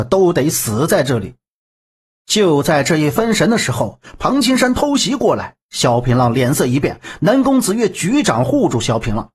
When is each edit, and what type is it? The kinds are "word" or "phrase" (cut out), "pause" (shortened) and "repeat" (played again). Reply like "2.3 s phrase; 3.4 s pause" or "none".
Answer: none

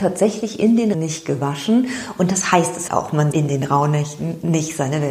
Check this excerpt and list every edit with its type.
0.9 s word; 2.9 s word; 3.3 s word

